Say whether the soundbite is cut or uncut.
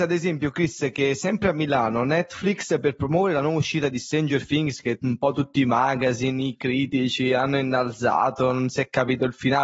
uncut